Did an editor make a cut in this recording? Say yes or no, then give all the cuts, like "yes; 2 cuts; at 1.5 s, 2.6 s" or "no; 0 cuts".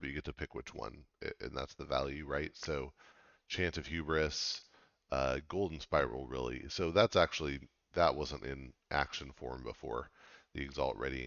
no; 0 cuts